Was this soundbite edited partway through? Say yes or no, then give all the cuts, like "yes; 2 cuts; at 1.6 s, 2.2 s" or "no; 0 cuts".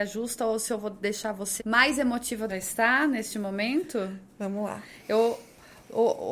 yes; 2 cuts; at 1.6 s, 2.5 s